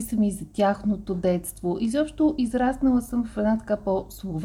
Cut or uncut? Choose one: uncut